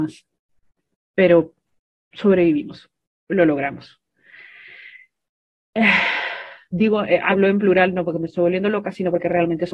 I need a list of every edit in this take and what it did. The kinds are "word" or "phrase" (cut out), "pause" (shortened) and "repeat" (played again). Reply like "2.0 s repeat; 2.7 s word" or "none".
none